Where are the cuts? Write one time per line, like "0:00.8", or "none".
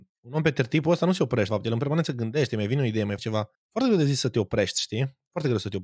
0:01.5
0:03.2
0:03.5